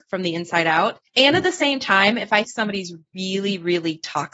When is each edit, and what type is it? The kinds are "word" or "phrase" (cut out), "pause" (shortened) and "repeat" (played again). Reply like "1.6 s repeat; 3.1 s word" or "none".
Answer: 1.1 s pause; 2.4 s word